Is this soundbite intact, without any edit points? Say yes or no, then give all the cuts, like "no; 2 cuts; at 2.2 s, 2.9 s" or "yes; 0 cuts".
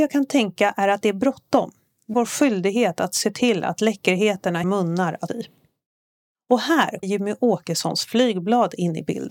no; 4 cuts; at 2.1 s, 4.6 s, 5.3 s, 7.0 s